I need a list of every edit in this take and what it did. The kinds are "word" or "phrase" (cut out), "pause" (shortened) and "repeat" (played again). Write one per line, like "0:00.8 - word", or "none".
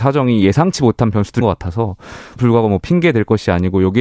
0:01.4 - word
0:02.4 - word